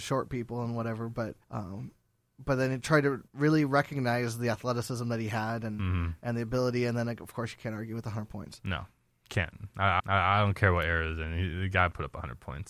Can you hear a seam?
yes; 3 cuts; at 1.4 s, 3.3 s, 10.0 s

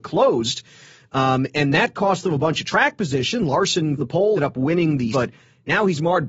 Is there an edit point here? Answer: yes; 3 cuts; at 4.0 s, 4.4 s, 5.1 s

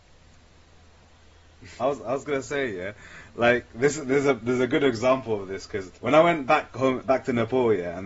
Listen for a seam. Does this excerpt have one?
yes; 4 cuts; at 1.8 s, 6.0 s, 6.7 s, 7.0 s

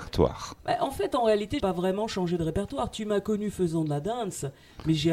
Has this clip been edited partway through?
yes; 1 cut; at 1.6 s

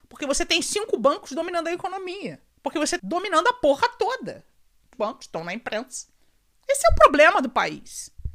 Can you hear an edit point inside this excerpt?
yes; 3 cuts; at 2.5 s, 3.0 s, 4.9 s

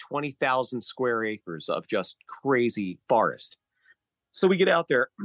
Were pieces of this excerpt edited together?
no; 0 cuts

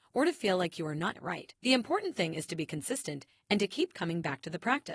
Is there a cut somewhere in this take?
yes; 2 cuts; at 1.1 s, 1.6 s

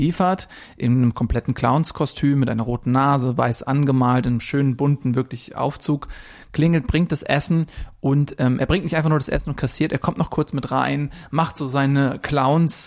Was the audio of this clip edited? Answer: no; 0 cuts

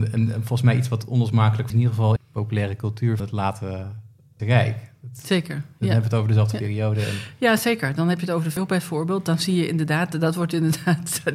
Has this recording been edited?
yes; 5 cuts; at 1.7 s, 2.2 s, 3.2 s, 4.4 s, 8.6 s

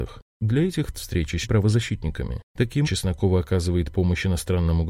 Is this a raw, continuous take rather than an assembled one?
no; 3 cuts; at 0.9 s, 1.4 s, 2.8 s

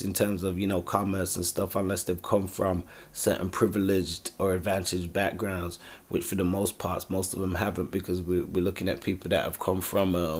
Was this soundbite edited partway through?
no; 0 cuts

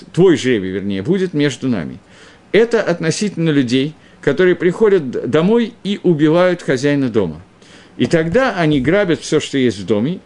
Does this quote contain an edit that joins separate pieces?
no; 0 cuts

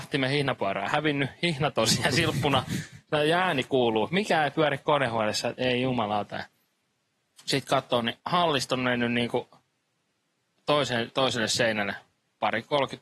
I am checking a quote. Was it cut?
yes; 1 cut; at 8.2 s

